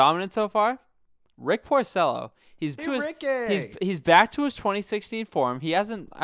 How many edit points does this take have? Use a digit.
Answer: 1